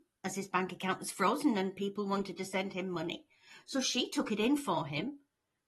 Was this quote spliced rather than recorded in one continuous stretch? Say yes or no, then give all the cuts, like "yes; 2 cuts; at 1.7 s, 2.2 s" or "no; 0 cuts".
no; 0 cuts